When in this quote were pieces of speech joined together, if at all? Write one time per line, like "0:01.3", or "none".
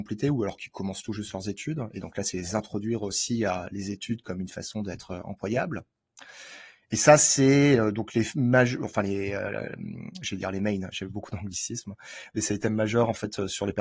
none